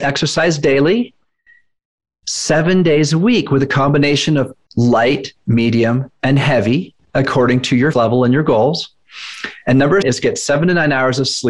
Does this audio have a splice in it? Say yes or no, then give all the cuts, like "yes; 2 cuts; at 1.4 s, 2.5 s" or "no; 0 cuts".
yes; 2 cuts; at 7.9 s, 10.0 s